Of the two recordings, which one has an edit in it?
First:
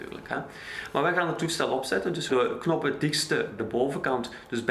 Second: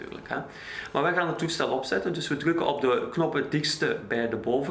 first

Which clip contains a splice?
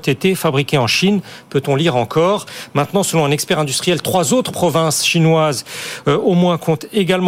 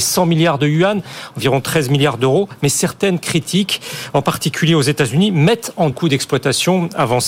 second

